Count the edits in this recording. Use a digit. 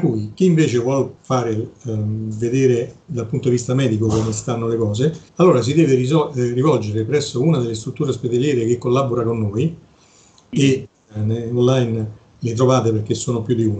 1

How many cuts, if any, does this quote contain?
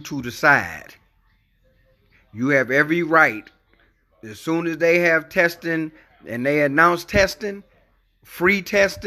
0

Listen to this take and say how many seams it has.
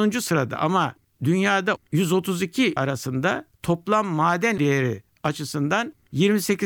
3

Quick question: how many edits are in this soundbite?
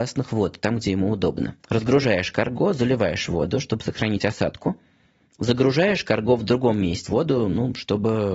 2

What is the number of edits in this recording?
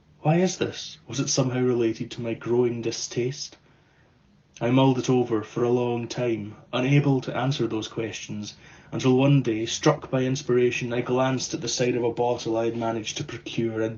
1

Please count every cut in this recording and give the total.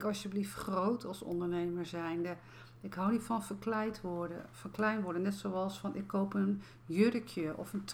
0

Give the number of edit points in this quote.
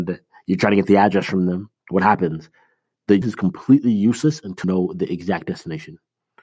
3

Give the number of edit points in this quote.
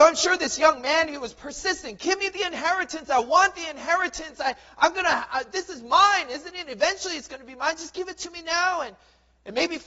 0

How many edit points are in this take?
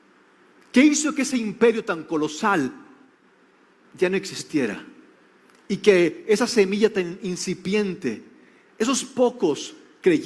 0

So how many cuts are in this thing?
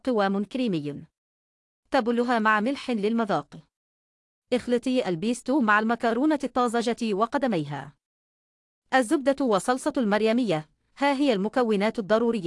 0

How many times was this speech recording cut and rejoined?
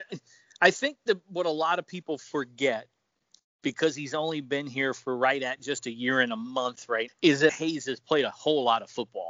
2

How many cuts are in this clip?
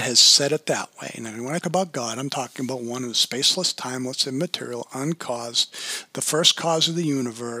1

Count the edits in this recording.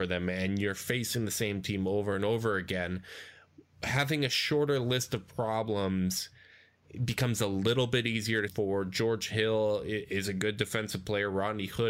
1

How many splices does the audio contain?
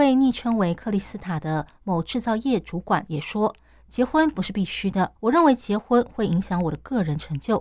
1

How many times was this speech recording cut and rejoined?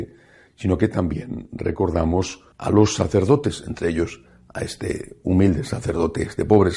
1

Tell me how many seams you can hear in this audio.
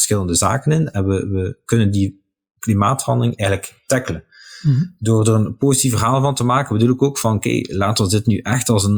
0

